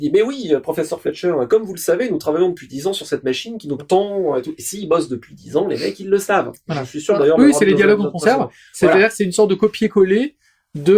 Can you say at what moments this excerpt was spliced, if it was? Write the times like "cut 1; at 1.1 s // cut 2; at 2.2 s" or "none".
cut 1; at 3.8 s

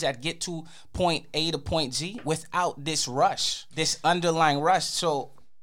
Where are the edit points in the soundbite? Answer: none

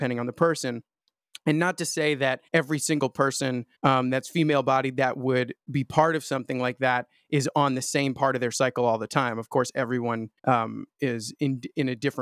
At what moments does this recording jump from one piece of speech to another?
cut 1; at 2.5 s // cut 2; at 3.7 s // cut 3; at 10.4 s

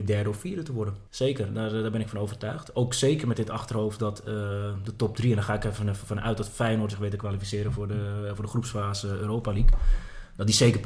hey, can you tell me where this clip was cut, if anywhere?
cut 1; at 1.1 s

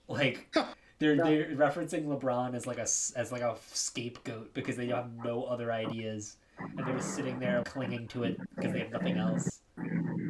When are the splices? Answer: cut 1; at 7.6 s

